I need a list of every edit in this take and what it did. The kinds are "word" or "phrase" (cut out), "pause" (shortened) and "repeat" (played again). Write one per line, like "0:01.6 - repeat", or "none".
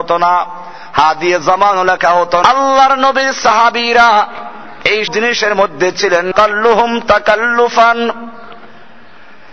0:02.4 - word
0:05.1 - word
0:06.3 - word